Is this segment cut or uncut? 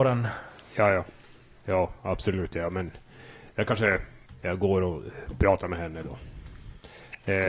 uncut